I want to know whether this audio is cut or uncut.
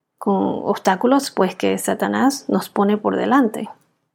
uncut